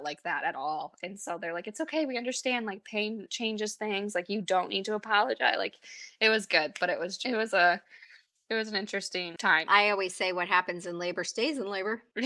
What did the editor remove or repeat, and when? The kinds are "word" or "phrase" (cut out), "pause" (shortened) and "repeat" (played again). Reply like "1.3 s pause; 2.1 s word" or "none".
none